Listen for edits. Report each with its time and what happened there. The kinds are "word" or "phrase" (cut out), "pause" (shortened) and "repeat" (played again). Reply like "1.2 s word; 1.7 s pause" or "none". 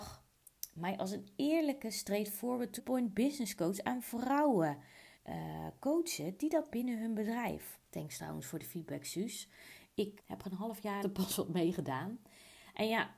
2.8 s word; 5.1 s pause; 6.7 s phrase; 7.9 s pause; 10.2 s word; 11.0 s word